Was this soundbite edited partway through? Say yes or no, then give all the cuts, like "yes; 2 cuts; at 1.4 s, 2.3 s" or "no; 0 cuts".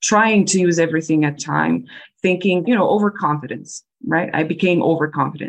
yes; 2 cuts; at 1.4 s, 2.6 s